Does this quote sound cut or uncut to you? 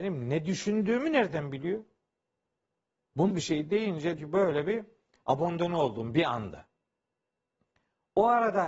cut